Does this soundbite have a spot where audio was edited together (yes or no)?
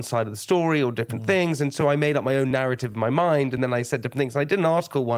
no